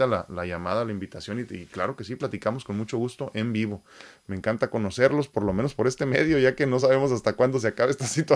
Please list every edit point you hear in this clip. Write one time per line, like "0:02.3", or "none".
none